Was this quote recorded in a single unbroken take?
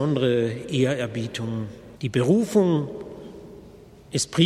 no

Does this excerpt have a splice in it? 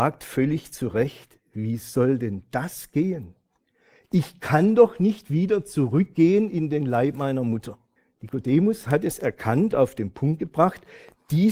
yes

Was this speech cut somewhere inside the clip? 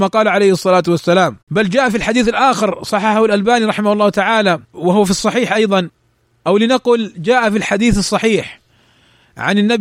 yes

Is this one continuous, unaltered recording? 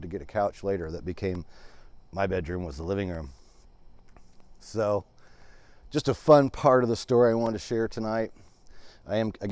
yes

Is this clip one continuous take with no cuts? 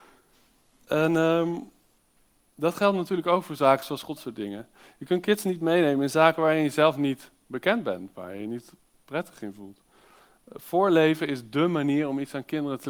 no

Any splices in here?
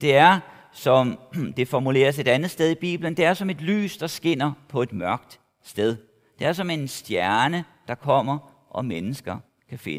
no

